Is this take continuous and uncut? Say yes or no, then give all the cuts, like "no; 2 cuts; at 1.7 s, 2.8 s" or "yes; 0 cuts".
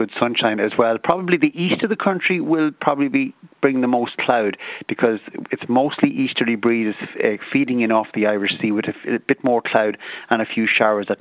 yes; 0 cuts